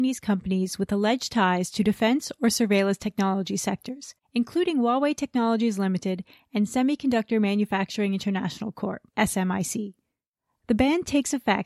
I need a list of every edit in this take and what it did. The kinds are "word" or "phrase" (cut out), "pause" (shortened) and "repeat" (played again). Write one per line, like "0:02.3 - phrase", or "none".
0:09.1 - pause

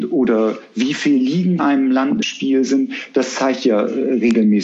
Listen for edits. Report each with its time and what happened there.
0:01.6 - word
0:02.2 - phrase

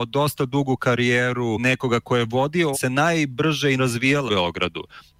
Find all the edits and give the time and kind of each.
0:01.6 - word
0:02.7 - phrase
0:03.8 - word
0:04.3 - word

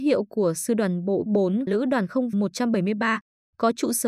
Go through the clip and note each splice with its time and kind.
0:01.3 - word
0:01.7 - word
0:02.3 - word

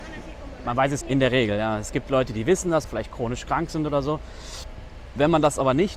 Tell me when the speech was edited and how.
0:01.0 - phrase
0:02.8 - phrase

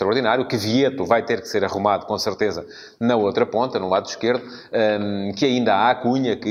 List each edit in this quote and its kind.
none

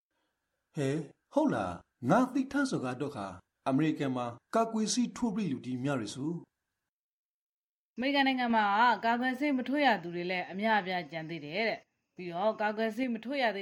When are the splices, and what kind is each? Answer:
none

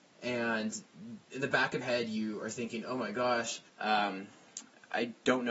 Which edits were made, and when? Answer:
0:01.2 - pause
0:01.8 - word
0:03.7 - pause

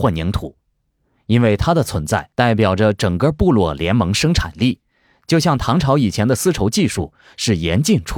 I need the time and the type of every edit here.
0:02.3 - pause

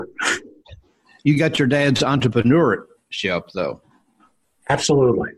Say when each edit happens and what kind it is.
none

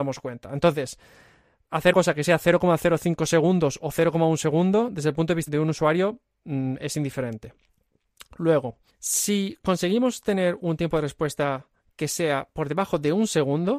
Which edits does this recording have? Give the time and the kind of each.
0:01.9 - word
0:05.5 - word
0:08.9 - pause

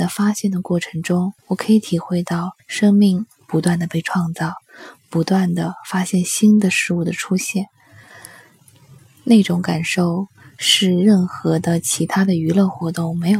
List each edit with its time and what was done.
0:01.4 - pause
0:02.6 - pause

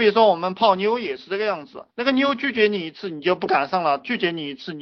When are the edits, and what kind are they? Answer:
0:01.9 - pause

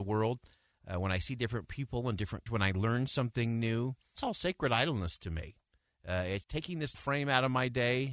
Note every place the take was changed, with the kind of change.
0:02.5 - word
0:04.1 - word
0:06.4 - word
0:06.9 - word

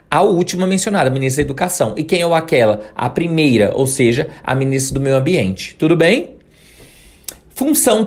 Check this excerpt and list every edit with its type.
none

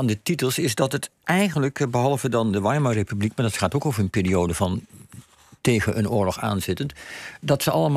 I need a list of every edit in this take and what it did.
none

